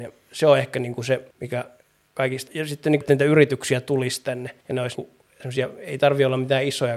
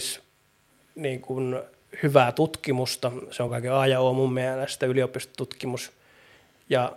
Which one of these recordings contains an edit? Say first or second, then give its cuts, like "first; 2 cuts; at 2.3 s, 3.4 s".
first; 5 cuts; at 1.3 s, 2.5 s, 3.0 s, 4.6 s, 4.9 s